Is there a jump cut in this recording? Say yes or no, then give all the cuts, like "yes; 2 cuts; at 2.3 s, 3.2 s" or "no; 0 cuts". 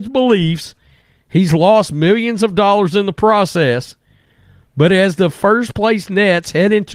no; 0 cuts